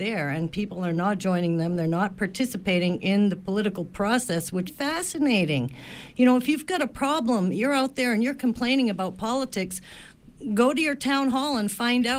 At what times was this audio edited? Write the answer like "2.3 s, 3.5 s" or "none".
4.7 s